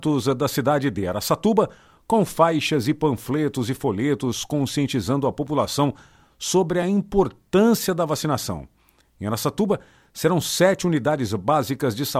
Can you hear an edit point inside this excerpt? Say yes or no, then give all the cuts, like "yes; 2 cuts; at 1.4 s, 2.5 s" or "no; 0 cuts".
no; 0 cuts